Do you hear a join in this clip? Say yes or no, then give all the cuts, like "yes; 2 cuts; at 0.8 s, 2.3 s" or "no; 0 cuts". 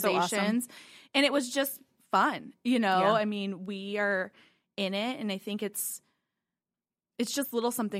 no; 0 cuts